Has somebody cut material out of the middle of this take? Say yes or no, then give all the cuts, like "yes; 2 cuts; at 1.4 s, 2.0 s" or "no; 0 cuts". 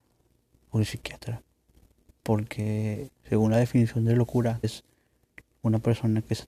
yes; 2 cuts; at 3.2 s, 4.6 s